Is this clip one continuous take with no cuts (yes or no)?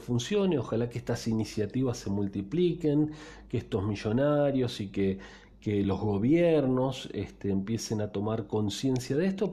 yes